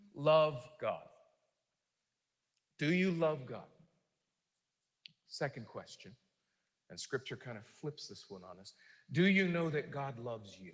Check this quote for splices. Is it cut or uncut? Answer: uncut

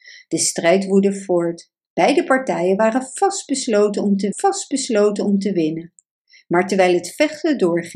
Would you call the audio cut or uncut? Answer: cut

